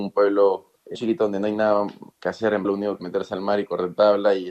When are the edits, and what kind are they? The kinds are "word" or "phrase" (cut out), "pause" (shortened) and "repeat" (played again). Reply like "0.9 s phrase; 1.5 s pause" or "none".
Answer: 0.9 s word; 2.1 s pause; 2.6 s word; 3.0 s phrase

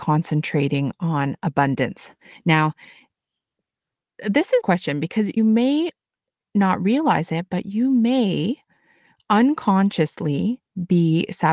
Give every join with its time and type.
4.6 s phrase; 5.4 s word

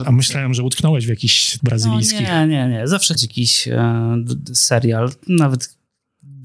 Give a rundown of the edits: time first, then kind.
1.6 s word; 3.2 s phrase

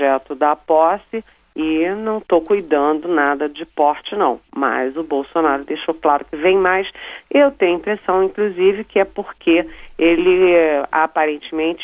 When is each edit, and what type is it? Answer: none

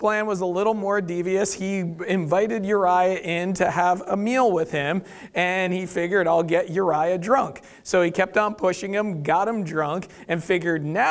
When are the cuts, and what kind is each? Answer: none

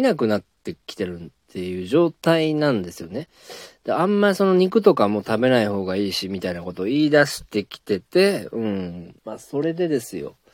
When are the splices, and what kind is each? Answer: 9.2 s pause

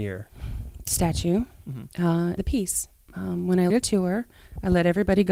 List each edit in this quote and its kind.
2.4 s word; 3.7 s word

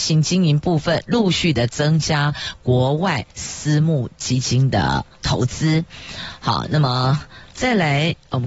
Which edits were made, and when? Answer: 5.1 s pause

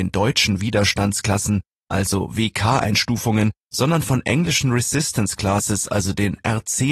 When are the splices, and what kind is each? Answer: none

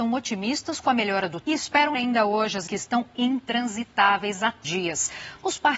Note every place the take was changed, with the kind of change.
1.4 s word; 1.9 s word; 2.7 s word; 4.6 s word

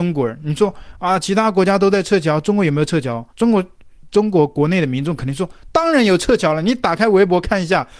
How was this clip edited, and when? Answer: 3.3 s pause

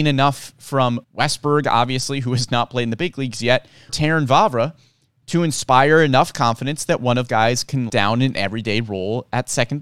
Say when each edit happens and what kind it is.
1.0 s word; 3.9 s word; 7.3 s word; 7.9 s word

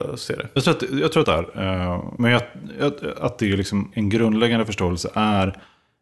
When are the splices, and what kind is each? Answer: 1.2 s phrase; 2.2 s word; 3.9 s word

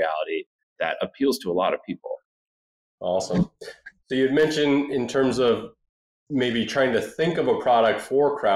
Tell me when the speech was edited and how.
none

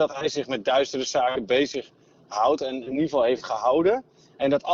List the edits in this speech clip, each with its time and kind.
none

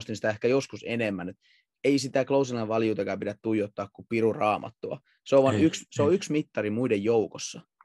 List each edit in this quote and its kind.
none

